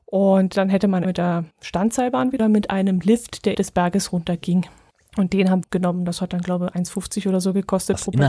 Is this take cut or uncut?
cut